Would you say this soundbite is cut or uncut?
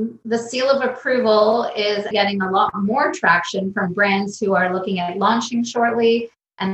cut